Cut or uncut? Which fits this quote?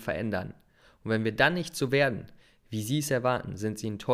uncut